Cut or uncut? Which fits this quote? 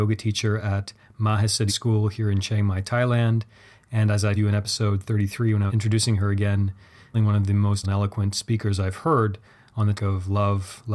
cut